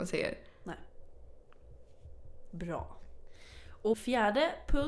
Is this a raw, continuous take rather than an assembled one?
no; 1 cut; at 3.9 s

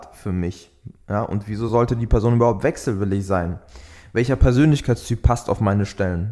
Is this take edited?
no; 0 cuts

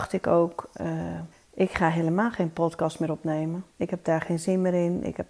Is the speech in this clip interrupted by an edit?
yes; 2 cuts; at 1.3 s, 3.7 s

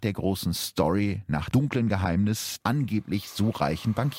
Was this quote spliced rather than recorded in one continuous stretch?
yes; 2 cuts; at 1.5 s, 2.6 s

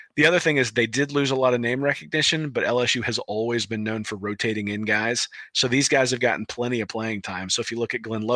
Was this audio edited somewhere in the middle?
no; 0 cuts

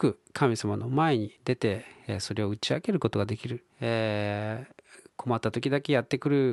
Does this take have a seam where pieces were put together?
yes; 3 cuts; at 1.4 s, 3.7 s, 5.1 s

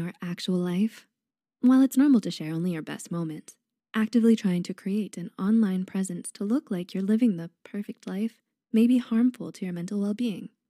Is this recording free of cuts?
yes; 0 cuts

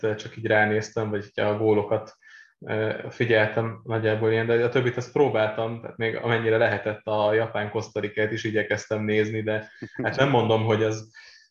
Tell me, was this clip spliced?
no; 0 cuts

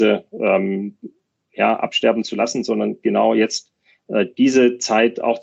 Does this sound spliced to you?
no; 0 cuts

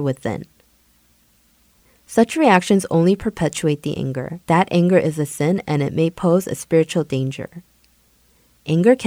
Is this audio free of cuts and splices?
no; 1 cut; at 4.4 s

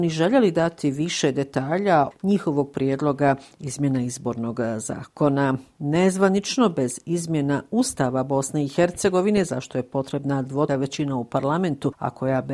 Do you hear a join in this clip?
yes; 2 cuts; at 2.1 s, 10.7 s

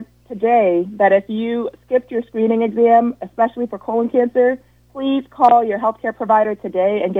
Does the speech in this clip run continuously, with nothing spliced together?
yes; 0 cuts

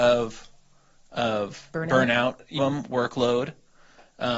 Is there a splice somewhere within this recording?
yes; 1 cut; at 2.6 s

